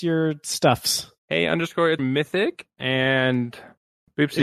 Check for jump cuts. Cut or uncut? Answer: cut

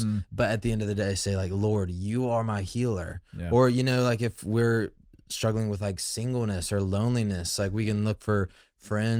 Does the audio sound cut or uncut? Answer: uncut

